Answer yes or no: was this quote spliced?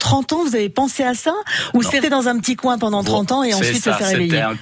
yes